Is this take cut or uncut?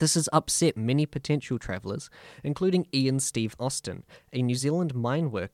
uncut